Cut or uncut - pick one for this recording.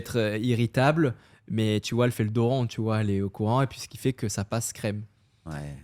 uncut